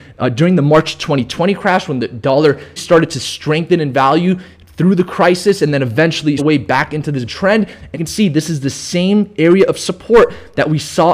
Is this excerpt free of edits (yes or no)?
no